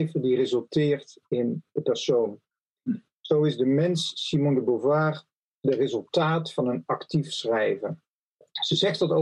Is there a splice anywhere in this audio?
no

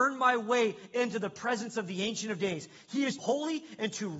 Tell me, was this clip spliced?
yes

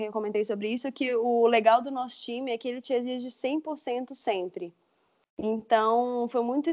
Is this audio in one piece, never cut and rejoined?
yes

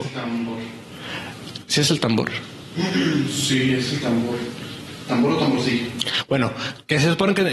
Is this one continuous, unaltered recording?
yes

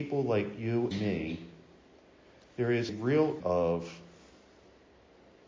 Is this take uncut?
no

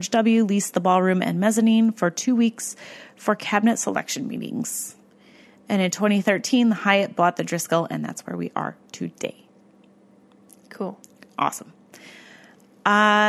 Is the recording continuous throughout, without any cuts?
yes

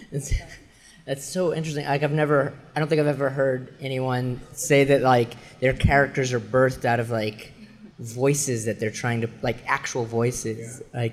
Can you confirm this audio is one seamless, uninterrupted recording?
no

